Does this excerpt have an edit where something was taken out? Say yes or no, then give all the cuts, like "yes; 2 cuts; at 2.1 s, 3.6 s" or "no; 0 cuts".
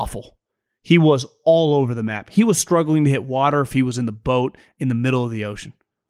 no; 0 cuts